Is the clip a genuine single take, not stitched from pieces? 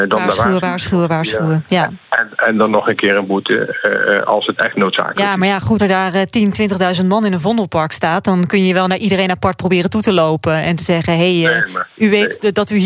no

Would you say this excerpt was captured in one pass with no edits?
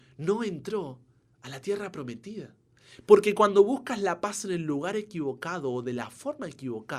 yes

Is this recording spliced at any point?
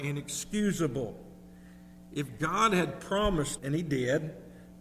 yes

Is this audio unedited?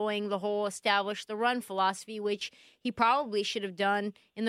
yes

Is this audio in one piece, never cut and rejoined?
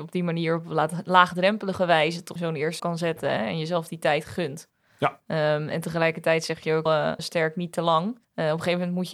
no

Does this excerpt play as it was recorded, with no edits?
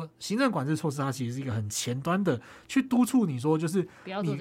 yes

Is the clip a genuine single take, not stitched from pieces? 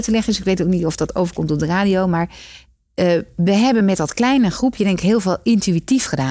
yes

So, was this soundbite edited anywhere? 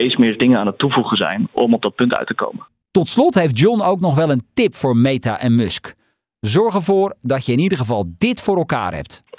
no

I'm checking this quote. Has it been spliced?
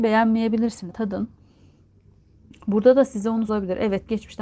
yes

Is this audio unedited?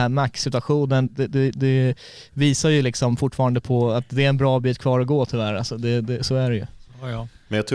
no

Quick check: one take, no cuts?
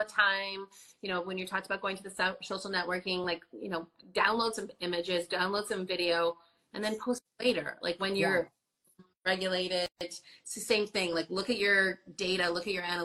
yes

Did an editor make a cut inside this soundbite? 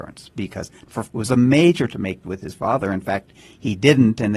yes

